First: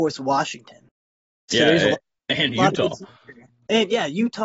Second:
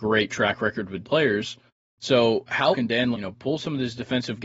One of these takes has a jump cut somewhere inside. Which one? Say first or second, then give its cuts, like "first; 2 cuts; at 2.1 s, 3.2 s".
second; 4 cuts; at 1.0 s, 1.7 s, 2.7 s, 3.1 s